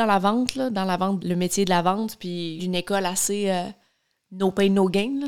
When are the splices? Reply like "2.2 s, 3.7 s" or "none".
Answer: 1.2 s, 2.6 s